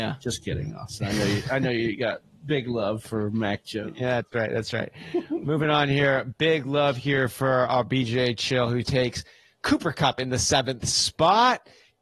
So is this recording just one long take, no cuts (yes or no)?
yes